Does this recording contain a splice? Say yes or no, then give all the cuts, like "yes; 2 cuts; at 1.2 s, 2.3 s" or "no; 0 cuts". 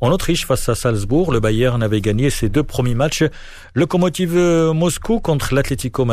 no; 0 cuts